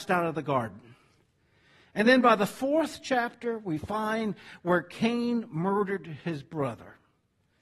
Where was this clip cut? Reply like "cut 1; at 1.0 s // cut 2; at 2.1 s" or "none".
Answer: none

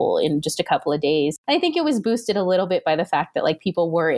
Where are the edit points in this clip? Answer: none

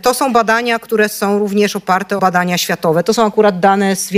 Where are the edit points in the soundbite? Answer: cut 1; at 2.2 s

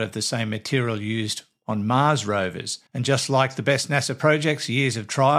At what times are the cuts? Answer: cut 1; at 2.9 s

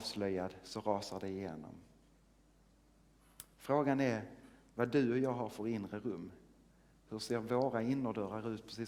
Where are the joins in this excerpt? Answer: none

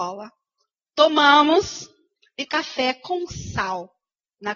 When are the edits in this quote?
cut 1; at 2.5 s

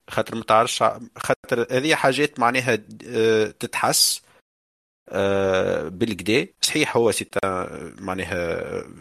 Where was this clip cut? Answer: cut 1; at 6.5 s

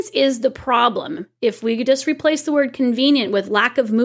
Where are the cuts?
none

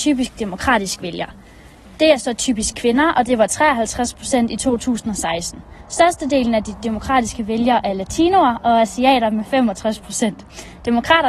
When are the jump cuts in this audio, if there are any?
none

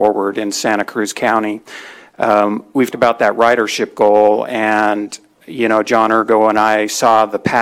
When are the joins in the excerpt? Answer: cut 1; at 2.9 s

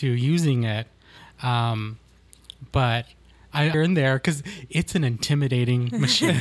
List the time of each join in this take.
cut 1; at 3.7 s

